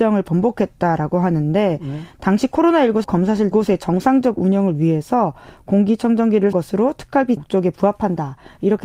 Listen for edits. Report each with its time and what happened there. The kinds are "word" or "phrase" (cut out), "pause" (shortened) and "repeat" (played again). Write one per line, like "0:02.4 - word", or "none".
0:03.0 - word
0:03.5 - word
0:06.5 - word
0:07.4 - word